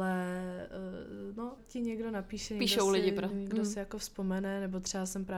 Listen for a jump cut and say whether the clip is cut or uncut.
cut